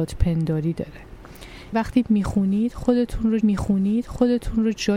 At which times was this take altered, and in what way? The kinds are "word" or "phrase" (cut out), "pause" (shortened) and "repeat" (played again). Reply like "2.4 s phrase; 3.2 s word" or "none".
1.7 s word; 3.4 s repeat